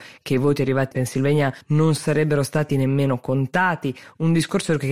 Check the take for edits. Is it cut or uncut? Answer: cut